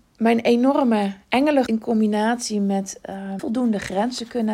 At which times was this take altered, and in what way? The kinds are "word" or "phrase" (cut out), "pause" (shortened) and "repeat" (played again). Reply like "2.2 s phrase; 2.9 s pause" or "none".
1.7 s word; 3.4 s word